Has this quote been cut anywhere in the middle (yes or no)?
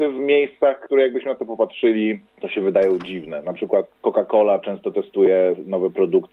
yes